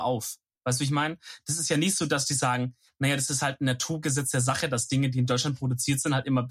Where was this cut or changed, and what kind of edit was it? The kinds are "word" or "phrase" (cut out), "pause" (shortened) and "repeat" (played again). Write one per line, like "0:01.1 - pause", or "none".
none

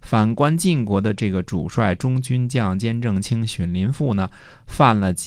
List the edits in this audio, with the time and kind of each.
none

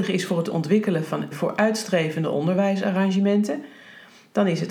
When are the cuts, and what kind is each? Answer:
0:01.3 - word

